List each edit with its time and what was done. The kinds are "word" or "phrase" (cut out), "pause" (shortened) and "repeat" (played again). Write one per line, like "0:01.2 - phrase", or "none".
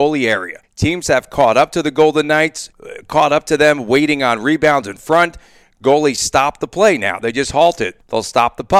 none